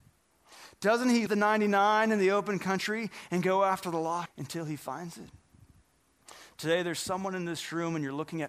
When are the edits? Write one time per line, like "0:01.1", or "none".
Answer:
0:01.3
0:04.3

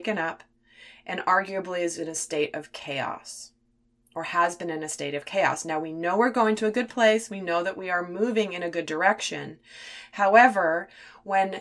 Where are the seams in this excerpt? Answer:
none

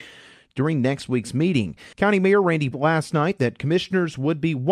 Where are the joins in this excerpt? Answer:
0:01.9
0:02.7

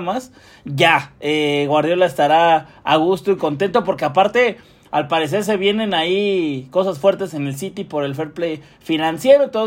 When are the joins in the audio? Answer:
none

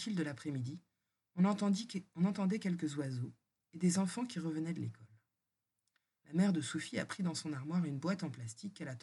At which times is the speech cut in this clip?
none

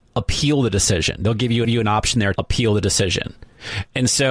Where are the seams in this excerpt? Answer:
0:01.6
0:02.4

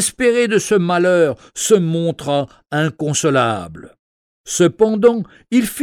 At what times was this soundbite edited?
none

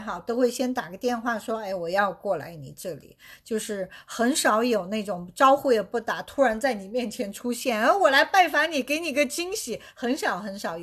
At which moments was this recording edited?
none

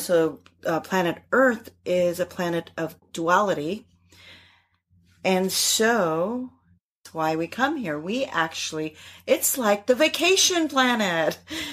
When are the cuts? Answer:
none

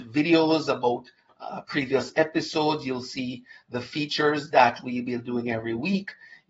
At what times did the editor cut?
none

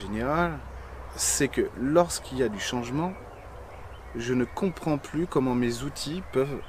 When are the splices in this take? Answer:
none

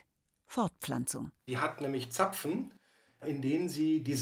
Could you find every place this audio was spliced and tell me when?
0:01.4

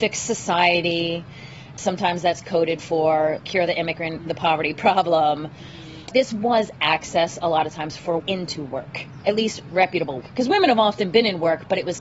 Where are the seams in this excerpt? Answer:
0:01.8
0:03.4
0:04.2
0:06.1
0:08.2
0:10.2

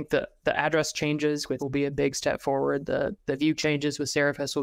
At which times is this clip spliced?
0:01.6
0:03.2
0:03.6

